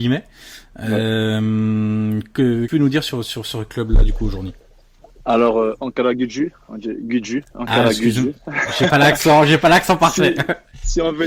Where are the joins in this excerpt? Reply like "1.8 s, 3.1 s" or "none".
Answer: 2.7 s